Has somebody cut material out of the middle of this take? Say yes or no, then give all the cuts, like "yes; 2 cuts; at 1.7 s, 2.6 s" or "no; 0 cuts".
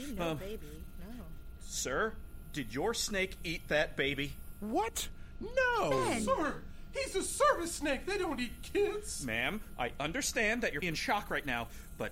yes; 1 cut; at 10.8 s